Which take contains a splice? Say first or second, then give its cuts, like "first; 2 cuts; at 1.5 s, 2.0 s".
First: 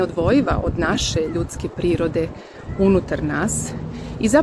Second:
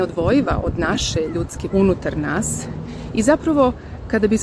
second; 1 cut; at 1.7 s